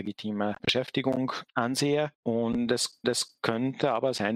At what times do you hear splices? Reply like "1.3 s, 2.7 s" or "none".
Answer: 3.0 s